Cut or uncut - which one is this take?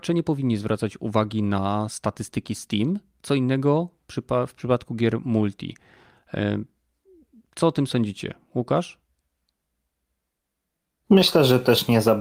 uncut